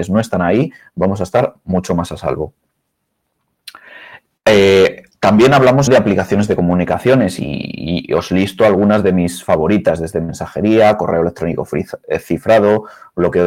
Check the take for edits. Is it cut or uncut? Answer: cut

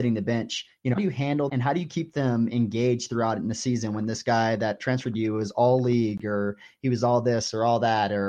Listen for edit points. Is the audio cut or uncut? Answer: cut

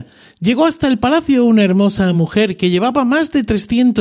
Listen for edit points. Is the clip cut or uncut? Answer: uncut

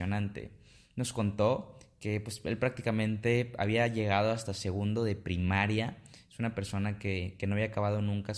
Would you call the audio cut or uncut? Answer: uncut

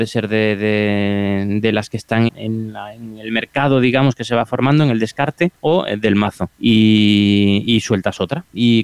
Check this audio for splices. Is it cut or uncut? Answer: cut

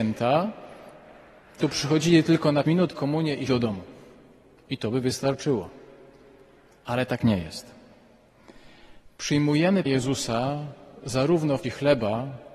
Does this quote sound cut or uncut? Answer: cut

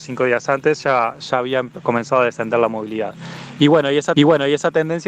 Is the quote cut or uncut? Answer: cut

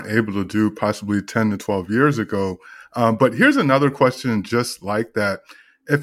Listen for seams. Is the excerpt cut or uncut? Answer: uncut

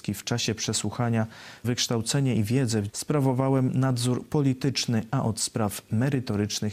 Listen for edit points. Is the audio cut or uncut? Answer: cut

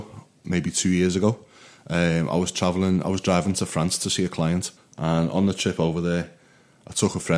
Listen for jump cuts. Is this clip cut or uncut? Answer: cut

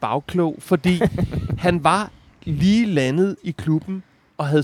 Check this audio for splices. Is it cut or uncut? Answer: uncut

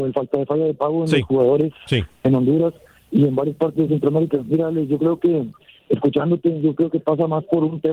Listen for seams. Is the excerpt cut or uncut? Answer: uncut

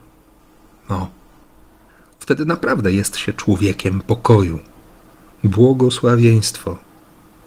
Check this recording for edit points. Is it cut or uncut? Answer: uncut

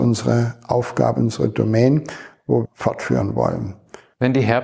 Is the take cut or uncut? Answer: cut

